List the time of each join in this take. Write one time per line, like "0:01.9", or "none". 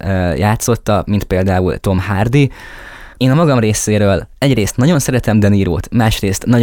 0:03.1